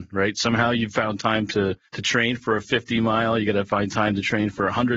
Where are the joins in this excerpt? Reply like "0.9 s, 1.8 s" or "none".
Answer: 1.9 s